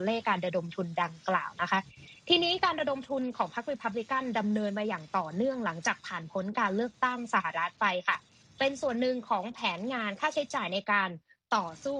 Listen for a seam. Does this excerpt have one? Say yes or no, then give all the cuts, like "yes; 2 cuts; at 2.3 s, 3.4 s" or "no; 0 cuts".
no; 0 cuts